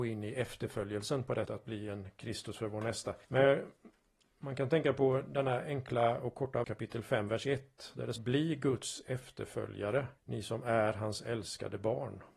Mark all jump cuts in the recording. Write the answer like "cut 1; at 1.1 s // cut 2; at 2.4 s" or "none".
cut 1; at 1.4 s // cut 2; at 3.2 s // cut 3; at 6.6 s // cut 4; at 8.2 s // cut 5; at 10.2 s